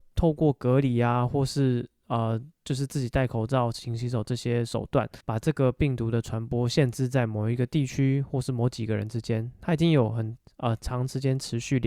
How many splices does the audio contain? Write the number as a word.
one